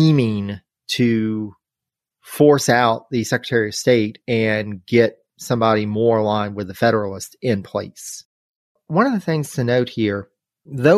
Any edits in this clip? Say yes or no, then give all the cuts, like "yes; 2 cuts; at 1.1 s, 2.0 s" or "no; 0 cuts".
no; 0 cuts